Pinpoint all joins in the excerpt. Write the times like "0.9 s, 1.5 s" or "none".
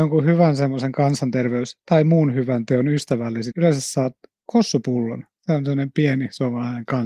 3.5 s